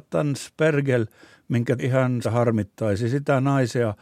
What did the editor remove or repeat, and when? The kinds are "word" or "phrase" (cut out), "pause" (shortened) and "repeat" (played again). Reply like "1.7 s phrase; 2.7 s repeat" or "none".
1.8 s phrase; 2.2 s word